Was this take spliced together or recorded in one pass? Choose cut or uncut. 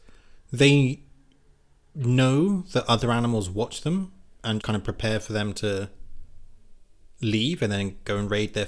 cut